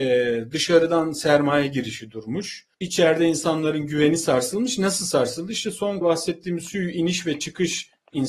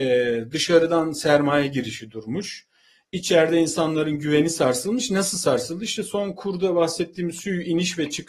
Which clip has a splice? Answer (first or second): first